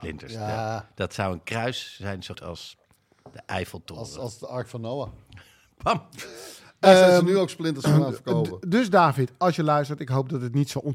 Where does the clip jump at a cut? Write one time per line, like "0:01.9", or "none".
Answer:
0:02.3